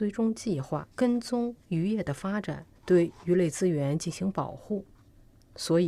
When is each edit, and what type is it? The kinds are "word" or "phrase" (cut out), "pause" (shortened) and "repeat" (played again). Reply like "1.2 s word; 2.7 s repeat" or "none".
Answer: 0.9 s pause; 2.8 s pause